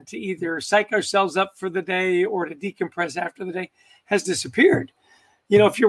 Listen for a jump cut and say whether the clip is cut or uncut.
uncut